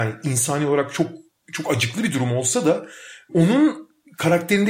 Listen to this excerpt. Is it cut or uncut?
cut